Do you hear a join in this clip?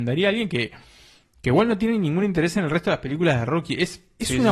no; 0 cuts

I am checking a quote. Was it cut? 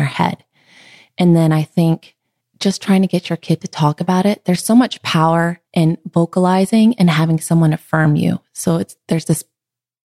yes; 2 cuts; at 2.2 s, 5.7 s

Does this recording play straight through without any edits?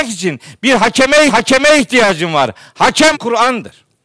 no; 2 cuts; at 1.3 s, 3.1 s

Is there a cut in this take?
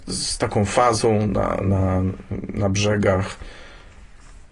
no; 0 cuts

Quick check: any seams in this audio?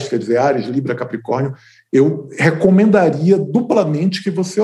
no; 0 cuts

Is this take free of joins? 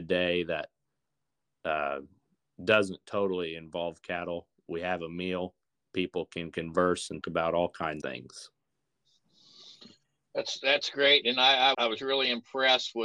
no; 3 cuts; at 7.2 s, 8.0 s, 11.7 s

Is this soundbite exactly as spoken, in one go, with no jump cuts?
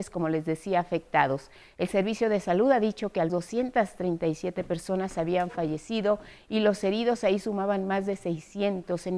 no; 1 cut; at 3.3 s

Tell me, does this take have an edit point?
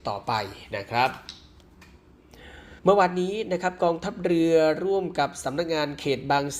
yes; 1 cut; at 2.8 s

